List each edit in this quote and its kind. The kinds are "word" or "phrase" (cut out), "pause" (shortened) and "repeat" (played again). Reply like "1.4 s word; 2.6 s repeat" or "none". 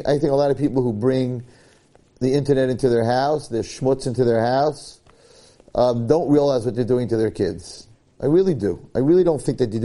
none